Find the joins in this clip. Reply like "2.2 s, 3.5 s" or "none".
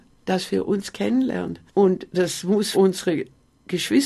1.7 s, 2.7 s

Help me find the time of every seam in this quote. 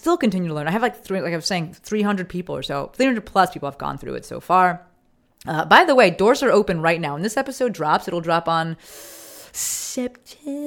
none

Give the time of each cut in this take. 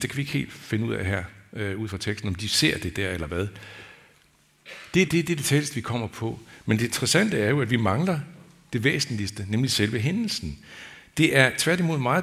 5.1 s

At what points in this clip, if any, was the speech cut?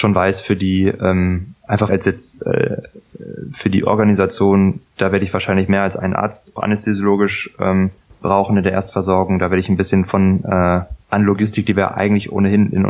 1.9 s, 6.6 s, 8.0 s, 11.0 s

